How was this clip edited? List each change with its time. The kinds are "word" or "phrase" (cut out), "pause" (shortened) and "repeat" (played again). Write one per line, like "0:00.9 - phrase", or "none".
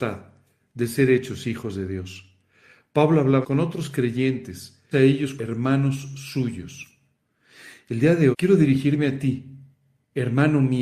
0:03.4 - word
0:04.9 - word
0:05.4 - word
0:08.3 - word